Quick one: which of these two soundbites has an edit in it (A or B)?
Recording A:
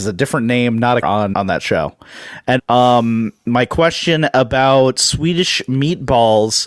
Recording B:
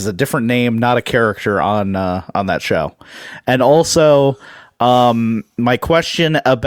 A